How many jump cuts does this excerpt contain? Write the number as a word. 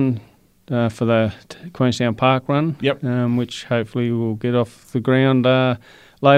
zero